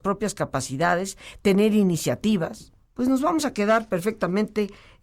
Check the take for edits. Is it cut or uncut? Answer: cut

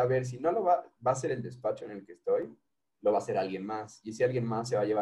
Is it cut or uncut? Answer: uncut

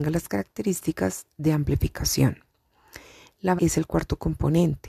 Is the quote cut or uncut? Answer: cut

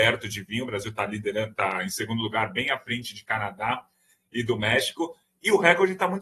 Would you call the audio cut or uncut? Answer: uncut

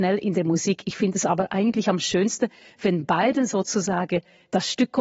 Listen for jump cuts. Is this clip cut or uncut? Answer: uncut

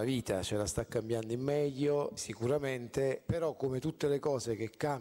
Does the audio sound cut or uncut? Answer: cut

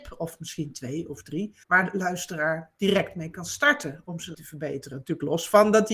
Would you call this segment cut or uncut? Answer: cut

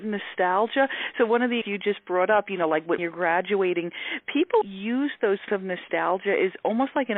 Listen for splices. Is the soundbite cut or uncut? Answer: cut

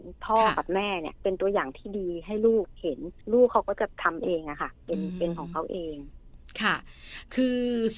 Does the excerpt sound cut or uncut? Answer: cut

